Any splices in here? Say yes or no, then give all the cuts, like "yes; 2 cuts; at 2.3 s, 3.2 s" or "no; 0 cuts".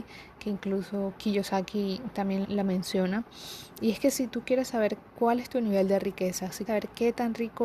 yes; 3 cuts; at 2.4 s, 5.1 s, 6.7 s